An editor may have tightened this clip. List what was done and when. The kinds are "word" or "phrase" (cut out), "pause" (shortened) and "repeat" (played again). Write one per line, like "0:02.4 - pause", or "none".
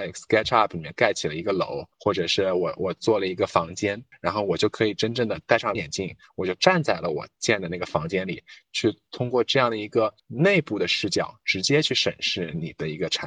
0:01.9 - pause
0:05.8 - word